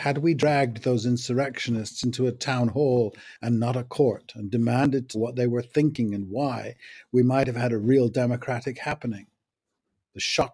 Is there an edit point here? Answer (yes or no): yes